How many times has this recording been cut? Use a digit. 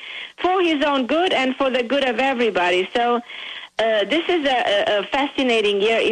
0